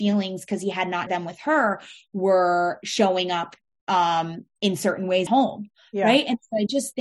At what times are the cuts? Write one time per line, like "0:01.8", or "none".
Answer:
0:01.1
0:05.3